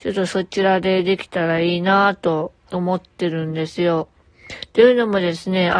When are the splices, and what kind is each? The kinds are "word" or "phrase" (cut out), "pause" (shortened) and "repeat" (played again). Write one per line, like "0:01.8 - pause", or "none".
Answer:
0:02.6 - pause